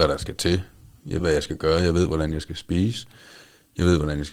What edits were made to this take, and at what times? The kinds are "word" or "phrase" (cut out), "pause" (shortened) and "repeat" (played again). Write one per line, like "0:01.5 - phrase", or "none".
0:01.2 - word